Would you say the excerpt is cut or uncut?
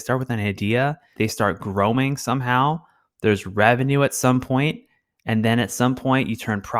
cut